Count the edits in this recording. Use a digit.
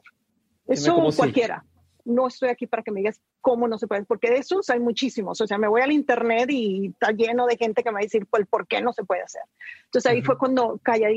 0